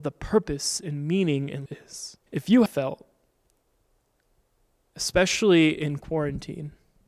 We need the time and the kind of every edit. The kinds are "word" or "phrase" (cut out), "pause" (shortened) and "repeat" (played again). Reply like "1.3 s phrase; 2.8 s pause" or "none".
1.7 s word; 2.2 s pause; 2.7 s word